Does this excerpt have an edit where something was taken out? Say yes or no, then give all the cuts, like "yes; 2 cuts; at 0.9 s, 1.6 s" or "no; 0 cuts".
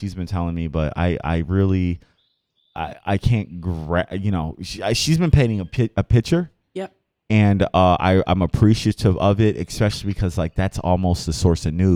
no; 0 cuts